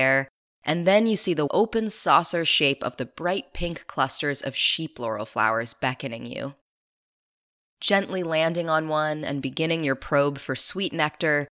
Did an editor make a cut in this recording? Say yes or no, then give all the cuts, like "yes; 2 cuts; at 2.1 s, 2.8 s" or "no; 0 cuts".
yes; 1 cut; at 1.5 s